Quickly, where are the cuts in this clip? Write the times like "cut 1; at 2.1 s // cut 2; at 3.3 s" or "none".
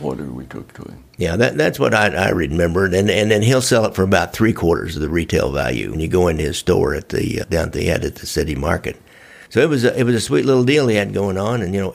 cut 1; at 5.9 s // cut 2; at 7.4 s // cut 3; at 9.5 s